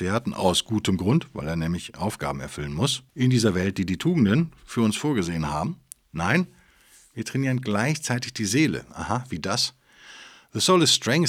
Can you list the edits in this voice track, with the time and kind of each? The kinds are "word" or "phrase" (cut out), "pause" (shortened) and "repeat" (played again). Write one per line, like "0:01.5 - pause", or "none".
0:03.1 - pause